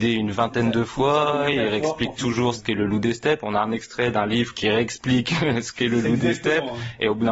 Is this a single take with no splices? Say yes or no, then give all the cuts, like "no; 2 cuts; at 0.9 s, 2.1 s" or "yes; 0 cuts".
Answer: yes; 0 cuts